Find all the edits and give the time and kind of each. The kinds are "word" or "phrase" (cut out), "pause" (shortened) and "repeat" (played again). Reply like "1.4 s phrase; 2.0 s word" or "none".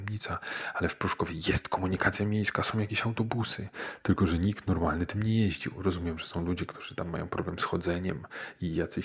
none